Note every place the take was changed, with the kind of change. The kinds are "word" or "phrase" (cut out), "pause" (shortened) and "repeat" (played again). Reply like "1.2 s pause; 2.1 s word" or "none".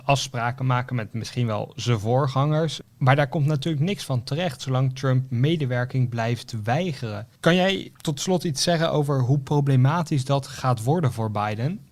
2.9 s pause; 7.4 s pause; 7.9 s pause